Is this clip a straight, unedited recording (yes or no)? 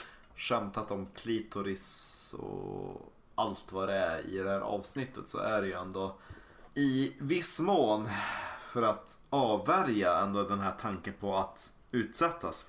yes